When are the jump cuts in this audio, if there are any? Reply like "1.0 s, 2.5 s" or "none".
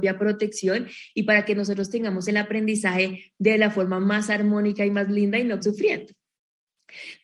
5.6 s